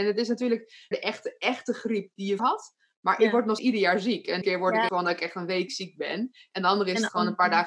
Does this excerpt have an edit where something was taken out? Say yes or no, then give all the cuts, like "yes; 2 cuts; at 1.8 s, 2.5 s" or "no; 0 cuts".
yes; 6 cuts; at 0.9 s, 2.4 s, 3.6 s, 4.4 s, 4.9 s, 5.7 s